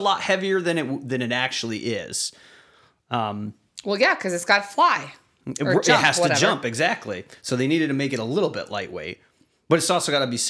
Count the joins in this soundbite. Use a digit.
0